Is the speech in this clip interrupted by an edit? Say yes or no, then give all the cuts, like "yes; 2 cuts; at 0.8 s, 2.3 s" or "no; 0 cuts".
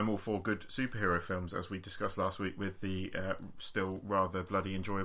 no; 0 cuts